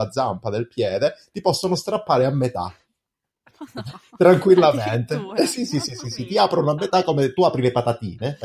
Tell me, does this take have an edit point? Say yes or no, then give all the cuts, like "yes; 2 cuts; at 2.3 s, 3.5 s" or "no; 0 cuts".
no; 0 cuts